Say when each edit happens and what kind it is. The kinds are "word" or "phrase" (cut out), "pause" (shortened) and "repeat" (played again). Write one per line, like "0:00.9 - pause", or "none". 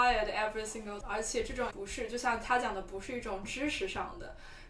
0:01.0 - word
0:01.7 - word